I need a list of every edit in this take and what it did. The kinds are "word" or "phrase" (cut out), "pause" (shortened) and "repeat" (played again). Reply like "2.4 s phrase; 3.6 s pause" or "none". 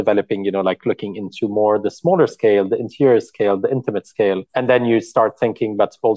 4.5 s pause